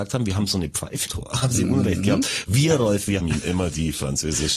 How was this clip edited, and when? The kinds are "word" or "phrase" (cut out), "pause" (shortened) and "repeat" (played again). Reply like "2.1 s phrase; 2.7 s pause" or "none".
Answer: 1.1 s word; 3.2 s word